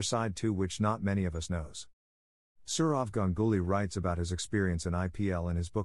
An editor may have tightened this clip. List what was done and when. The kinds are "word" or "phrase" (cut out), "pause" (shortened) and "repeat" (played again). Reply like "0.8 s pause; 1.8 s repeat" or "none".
none